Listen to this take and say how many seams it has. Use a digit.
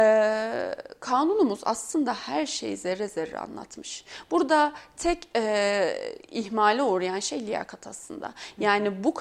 0